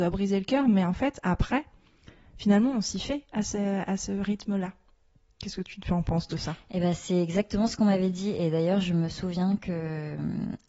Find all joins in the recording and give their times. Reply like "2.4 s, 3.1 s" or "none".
none